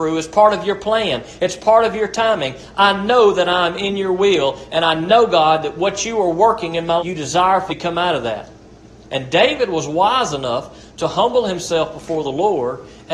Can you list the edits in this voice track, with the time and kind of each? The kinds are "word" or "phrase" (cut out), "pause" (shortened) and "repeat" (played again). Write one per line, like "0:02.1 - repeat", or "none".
0:07.0 - word
0:07.7 - word